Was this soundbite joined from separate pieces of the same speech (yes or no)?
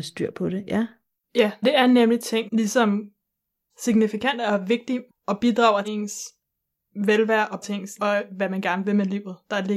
yes